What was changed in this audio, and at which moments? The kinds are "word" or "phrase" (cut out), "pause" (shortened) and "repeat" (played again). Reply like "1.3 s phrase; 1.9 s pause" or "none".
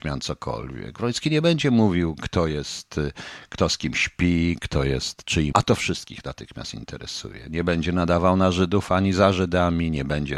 5.5 s word